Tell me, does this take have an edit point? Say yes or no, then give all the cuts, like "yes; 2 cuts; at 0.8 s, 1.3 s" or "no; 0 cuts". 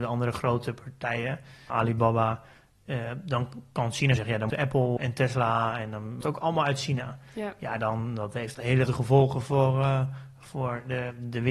yes; 7 cuts; at 1.7 s, 4.2 s, 4.5 s, 5.0 s, 6.2 s, 8.5 s, 8.9 s